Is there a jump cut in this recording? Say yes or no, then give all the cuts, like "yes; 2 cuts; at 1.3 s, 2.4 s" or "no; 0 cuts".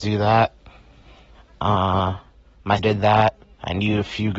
yes; 1 cut; at 2.8 s